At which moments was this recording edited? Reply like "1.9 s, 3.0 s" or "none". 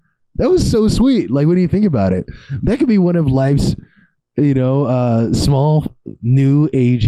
none